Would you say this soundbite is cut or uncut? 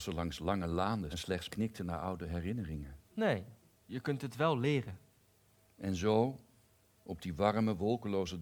cut